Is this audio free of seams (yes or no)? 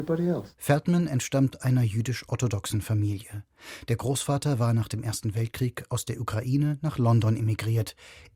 yes